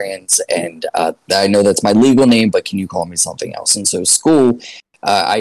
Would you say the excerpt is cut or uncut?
uncut